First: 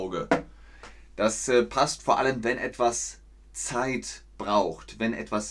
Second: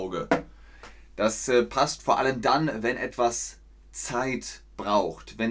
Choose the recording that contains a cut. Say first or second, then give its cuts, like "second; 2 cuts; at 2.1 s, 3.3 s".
first; 1 cut; at 2.4 s